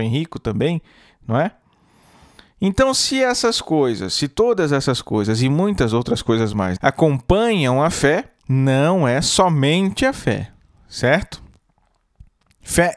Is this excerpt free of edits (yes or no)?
no